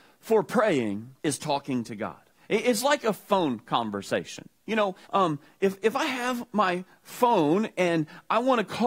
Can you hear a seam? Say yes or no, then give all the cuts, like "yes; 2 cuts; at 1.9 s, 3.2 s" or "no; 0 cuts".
yes; 3 cuts; at 1.2 s, 2.3 s, 5.0 s